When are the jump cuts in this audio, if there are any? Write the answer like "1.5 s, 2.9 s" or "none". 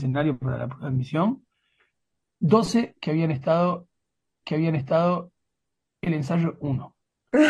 4.4 s

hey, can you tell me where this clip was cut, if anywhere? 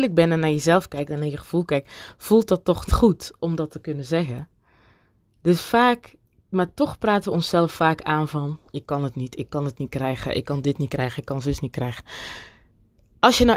2.9 s

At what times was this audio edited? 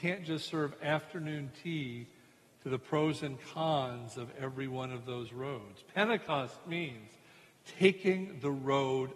none

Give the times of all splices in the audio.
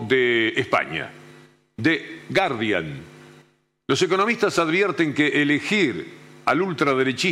none

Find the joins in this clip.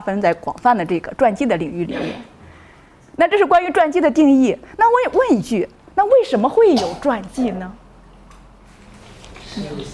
none

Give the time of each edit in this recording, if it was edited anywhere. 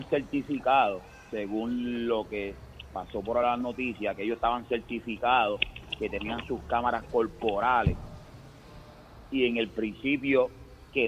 none

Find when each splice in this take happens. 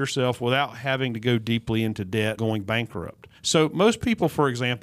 2.4 s, 3.4 s

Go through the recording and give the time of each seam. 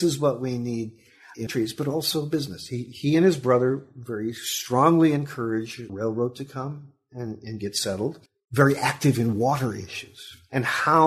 1.5 s, 5.9 s, 8.3 s

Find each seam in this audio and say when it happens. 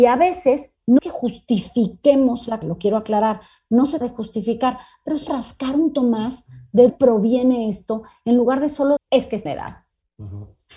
1.0 s, 2.6 s, 4.0 s, 5.3 s, 5.9 s, 6.9 s, 9.0 s, 9.5 s

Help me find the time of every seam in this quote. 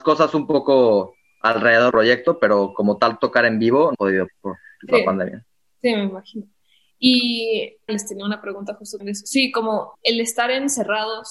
1.9 s, 3.9 s, 4.3 s, 7.9 s, 9.0 s, 9.9 s

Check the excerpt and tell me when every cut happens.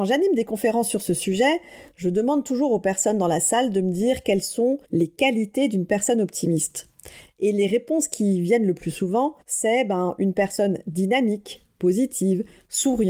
4.8 s, 9.4 s

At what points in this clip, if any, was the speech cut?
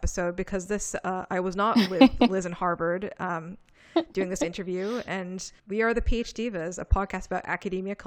5.6 s

